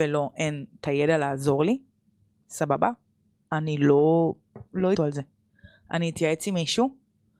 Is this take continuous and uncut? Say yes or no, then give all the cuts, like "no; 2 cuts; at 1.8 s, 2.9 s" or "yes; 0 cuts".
no; 1 cut; at 5.0 s